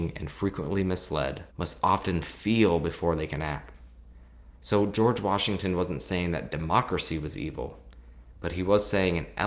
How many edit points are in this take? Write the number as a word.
one